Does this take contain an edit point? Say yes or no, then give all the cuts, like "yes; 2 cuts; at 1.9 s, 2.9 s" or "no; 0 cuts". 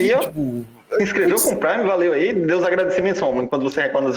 no; 0 cuts